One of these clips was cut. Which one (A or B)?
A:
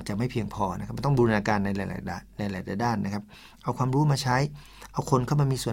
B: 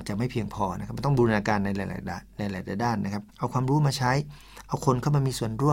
B